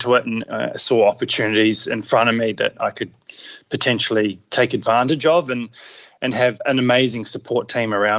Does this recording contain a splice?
no; 0 cuts

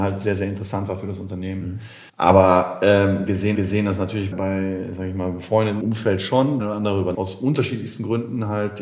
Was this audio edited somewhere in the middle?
yes; 6 cuts; at 2.1 s, 3.5 s, 4.3 s, 5.8 s, 6.6 s, 7.1 s

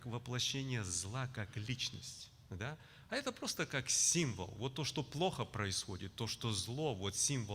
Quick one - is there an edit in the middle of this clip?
no; 0 cuts

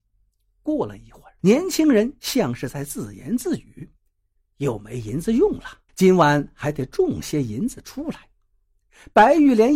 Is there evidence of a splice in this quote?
yes; 3 cuts; at 1.4 s, 4.0 s, 5.9 s

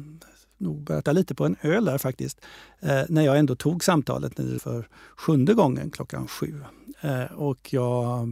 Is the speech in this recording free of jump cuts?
no; 2 cuts; at 1.0 s, 4.6 s

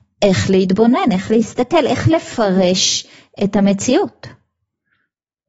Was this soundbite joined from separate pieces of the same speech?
no; 0 cuts

